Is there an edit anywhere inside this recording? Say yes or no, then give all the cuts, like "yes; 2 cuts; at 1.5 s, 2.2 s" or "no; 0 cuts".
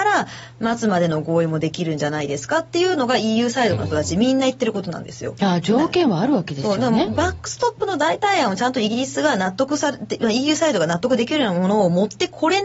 no; 0 cuts